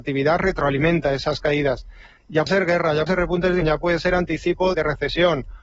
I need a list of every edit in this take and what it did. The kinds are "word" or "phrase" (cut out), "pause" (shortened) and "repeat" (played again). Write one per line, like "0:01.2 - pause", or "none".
0:02.5 - word
0:03.1 - word
0:03.6 - word
0:04.7 - word